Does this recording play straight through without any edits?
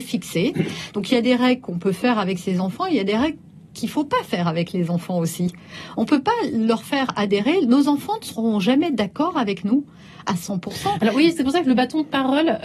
yes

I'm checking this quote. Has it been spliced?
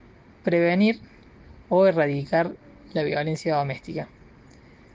no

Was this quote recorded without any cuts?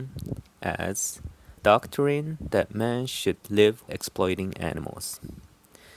no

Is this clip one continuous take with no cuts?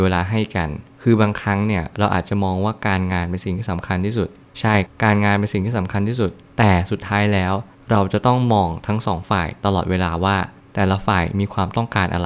yes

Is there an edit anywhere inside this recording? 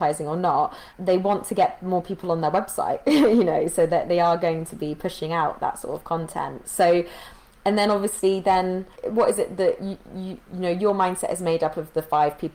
no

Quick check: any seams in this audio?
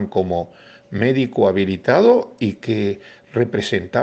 no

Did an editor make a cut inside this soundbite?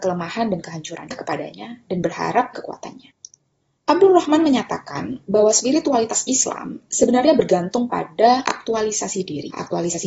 yes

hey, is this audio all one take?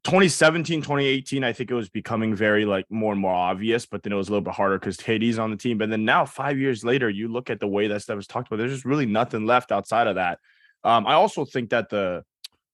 yes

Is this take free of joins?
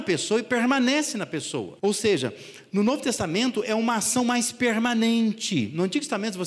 no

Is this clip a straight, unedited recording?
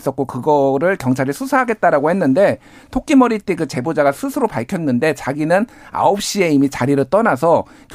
yes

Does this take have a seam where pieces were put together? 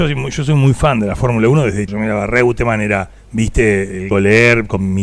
yes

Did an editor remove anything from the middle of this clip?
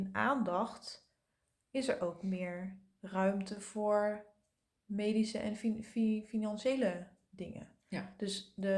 no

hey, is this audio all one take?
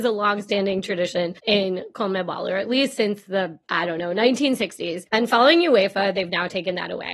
no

